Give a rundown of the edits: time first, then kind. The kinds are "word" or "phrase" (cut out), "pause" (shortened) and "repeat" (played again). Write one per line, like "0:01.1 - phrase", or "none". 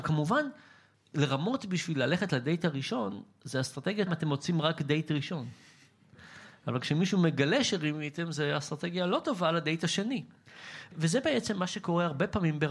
0:04.1 - word